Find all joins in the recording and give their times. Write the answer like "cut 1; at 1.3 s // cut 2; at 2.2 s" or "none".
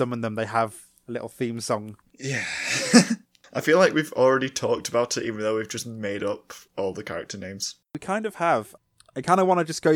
none